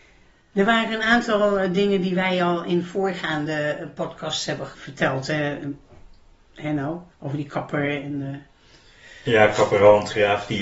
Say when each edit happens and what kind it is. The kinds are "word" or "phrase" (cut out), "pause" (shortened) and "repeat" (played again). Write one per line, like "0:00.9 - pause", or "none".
0:07.1 - pause